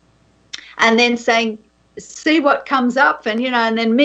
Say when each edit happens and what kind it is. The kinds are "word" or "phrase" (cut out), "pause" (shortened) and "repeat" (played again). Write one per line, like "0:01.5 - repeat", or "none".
0:01.7 - pause